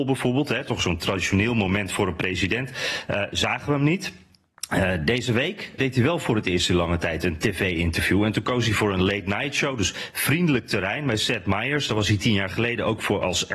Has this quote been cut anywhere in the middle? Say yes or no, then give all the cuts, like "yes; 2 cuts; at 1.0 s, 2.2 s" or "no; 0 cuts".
yes; 1 cut; at 5.8 s